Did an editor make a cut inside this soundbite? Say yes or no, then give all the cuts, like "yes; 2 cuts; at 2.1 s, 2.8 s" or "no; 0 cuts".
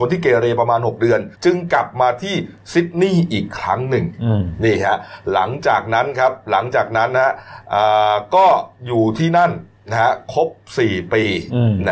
yes; 1 cut; at 1.3 s